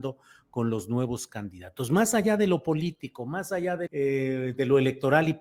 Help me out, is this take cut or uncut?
cut